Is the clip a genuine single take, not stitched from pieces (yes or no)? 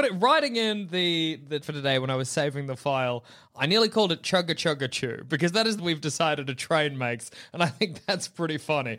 no